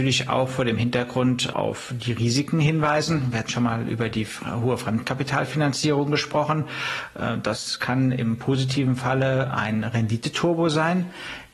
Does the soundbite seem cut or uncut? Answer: cut